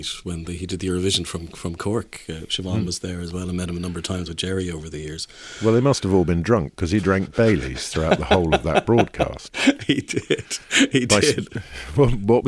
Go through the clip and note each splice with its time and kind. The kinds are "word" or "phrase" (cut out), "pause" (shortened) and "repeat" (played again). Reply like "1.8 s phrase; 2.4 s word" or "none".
none